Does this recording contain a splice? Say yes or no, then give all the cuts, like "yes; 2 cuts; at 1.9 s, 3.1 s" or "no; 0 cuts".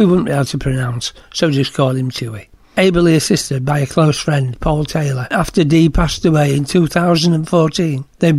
no; 0 cuts